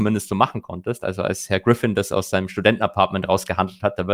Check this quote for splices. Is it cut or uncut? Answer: uncut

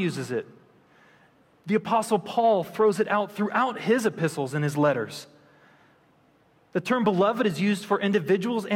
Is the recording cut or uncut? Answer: uncut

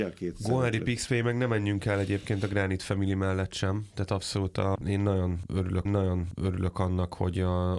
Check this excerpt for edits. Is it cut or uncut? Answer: cut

